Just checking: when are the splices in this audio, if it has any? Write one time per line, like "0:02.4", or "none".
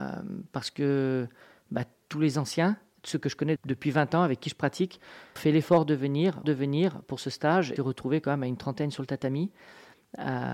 0:03.6
0:05.4
0:06.4
0:07.8